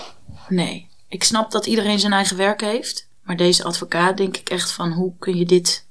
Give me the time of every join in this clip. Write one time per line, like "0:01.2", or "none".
0:03.2